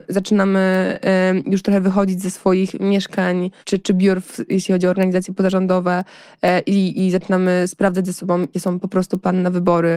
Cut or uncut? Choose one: cut